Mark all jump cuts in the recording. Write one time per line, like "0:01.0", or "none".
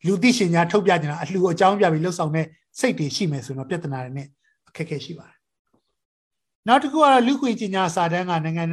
none